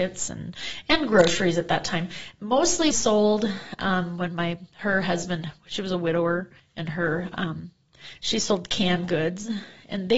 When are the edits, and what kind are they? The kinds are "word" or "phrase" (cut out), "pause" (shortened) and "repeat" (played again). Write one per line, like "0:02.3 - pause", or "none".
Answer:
0:02.9 - phrase
0:06.6 - pause